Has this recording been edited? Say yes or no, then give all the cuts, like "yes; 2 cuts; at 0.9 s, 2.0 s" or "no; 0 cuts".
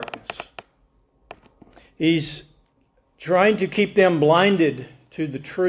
no; 0 cuts